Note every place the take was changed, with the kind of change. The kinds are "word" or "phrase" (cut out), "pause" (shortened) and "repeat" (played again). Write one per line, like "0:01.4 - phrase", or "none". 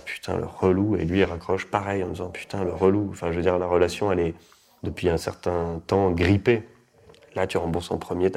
none